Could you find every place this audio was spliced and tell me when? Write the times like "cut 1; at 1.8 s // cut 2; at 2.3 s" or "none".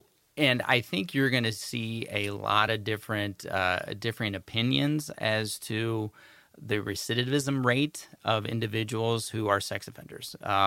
none